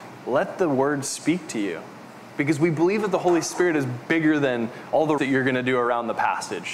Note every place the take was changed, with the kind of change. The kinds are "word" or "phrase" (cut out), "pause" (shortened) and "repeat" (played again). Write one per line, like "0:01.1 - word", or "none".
0:05.2 - word